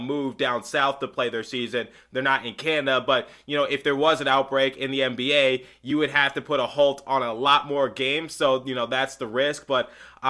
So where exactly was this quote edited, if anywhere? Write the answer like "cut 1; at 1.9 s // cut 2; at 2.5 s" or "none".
none